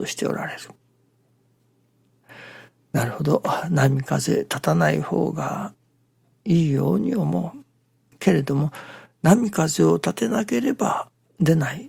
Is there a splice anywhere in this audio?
no; 0 cuts

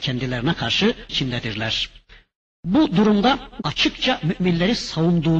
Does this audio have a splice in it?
yes; 2 cuts; at 1.1 s, 3.6 s

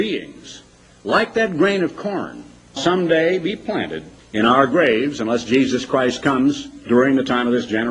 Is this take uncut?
no; 2 cuts; at 2.8 s, 4.2 s

